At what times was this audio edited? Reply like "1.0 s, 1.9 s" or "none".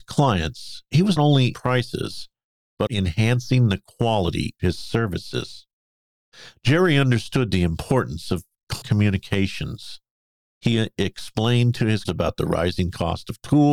1.2 s, 1.5 s, 2.9 s, 4.6 s, 8.8 s, 12.0 s